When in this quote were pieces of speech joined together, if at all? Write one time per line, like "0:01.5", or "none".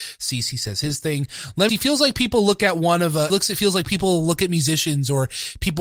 0:01.7
0:03.3